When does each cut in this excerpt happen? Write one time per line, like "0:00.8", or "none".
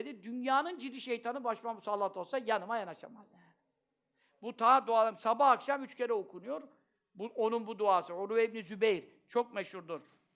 none